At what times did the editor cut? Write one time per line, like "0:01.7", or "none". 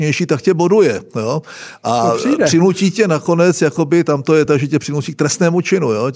none